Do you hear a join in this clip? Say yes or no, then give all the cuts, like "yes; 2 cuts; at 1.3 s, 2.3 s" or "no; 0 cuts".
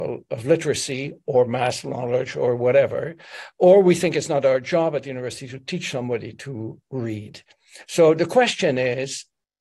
no; 0 cuts